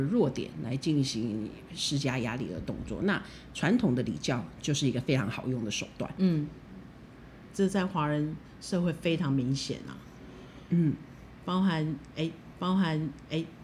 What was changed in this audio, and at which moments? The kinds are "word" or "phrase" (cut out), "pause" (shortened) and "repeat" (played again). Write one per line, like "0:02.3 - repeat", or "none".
0:12.5 - repeat